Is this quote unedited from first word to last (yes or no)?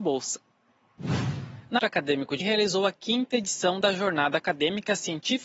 no